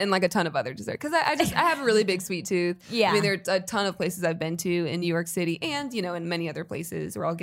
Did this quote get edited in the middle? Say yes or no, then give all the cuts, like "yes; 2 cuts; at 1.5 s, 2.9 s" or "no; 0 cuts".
no; 0 cuts